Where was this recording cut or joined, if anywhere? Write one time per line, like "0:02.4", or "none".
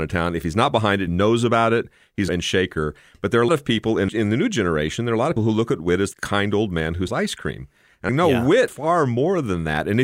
0:01.1
0:02.3
0:03.5
0:04.1
0:05.4
0:06.1
0:07.1
0:08.1
0:08.7